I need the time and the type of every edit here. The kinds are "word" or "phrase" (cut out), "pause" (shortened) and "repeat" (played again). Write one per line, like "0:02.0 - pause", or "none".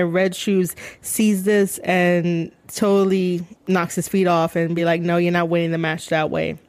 none